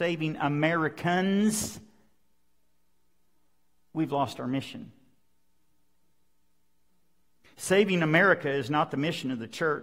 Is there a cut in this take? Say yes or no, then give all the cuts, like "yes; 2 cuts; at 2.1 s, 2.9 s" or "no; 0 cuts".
no; 0 cuts